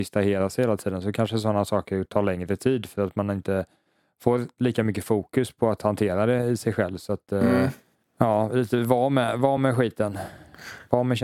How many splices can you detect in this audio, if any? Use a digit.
0